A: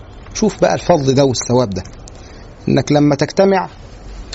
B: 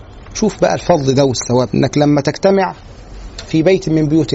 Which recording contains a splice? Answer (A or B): B